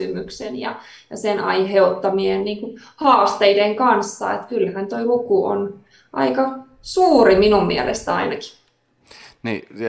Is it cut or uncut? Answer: uncut